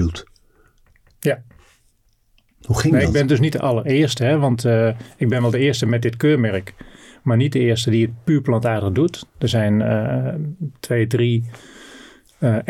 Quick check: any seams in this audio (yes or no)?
no